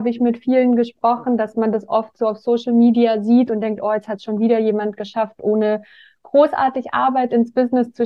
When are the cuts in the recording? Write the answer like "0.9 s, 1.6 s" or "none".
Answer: none